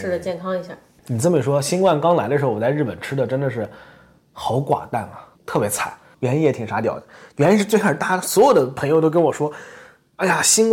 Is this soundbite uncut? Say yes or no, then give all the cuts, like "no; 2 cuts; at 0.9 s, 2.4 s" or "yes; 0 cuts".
no; 1 cut; at 5.3 s